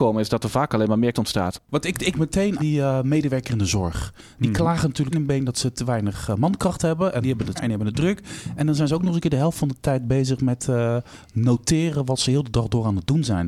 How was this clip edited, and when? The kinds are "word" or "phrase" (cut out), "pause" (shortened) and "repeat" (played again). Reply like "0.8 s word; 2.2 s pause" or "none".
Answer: 1.1 s word; 2.1 s word; 2.6 s word; 5.1 s word; 7.2 s word; 7.6 s word